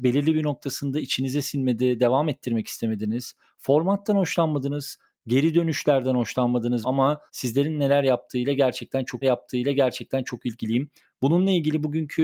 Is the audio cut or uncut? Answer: cut